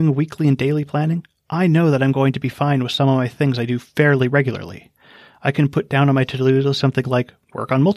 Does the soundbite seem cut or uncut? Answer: uncut